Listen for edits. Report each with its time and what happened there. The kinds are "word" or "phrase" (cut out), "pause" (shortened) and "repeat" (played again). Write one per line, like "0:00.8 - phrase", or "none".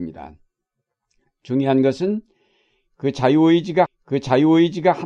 0:03.9 - repeat